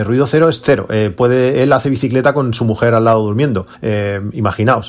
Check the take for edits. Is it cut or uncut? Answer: cut